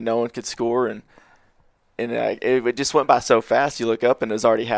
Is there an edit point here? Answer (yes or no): no